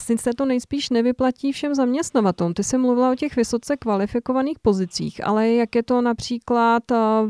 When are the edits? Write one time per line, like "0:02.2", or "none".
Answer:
none